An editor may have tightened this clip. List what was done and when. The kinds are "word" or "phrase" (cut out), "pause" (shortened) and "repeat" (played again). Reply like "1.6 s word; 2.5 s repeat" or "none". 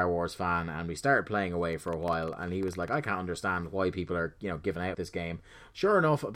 4.9 s word